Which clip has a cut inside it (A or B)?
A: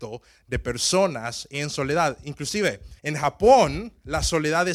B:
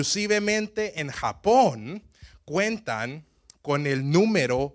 A